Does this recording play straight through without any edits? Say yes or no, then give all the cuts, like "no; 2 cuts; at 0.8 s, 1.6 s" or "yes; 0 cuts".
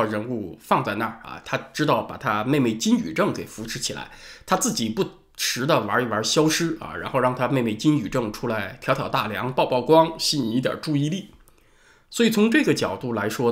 yes; 0 cuts